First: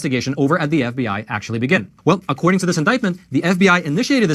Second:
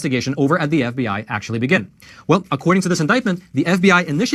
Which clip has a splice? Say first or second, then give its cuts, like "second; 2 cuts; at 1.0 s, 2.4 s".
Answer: first; 1 cut; at 2.0 s